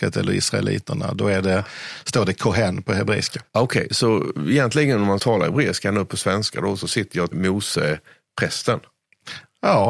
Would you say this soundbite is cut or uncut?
cut